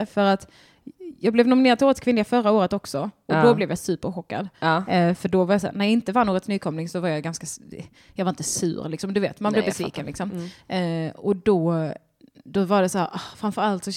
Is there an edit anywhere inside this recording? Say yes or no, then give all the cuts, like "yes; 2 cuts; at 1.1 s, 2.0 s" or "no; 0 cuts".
no; 0 cuts